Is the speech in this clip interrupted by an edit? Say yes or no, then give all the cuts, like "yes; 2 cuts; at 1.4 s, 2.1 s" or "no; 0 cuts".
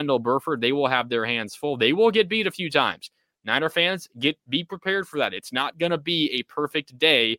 no; 0 cuts